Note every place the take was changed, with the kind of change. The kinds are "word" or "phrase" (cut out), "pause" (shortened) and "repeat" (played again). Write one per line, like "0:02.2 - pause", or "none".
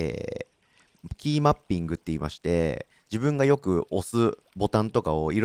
0:04.5 - pause